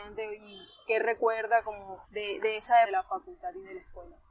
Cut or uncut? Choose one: cut